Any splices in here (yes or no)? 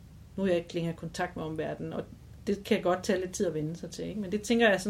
no